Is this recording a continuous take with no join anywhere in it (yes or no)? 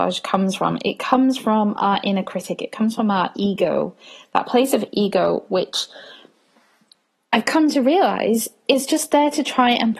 yes